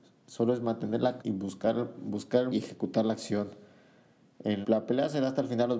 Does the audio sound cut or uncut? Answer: cut